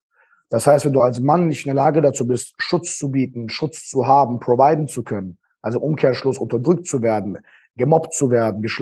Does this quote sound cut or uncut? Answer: uncut